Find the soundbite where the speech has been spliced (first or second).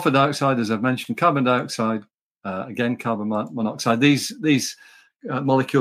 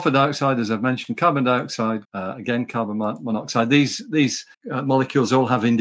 second